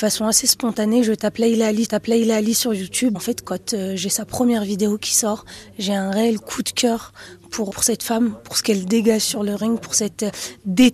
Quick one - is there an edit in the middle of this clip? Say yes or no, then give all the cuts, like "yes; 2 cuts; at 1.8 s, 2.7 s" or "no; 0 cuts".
yes; 3 cuts; at 1.8 s, 3.1 s, 7.7 s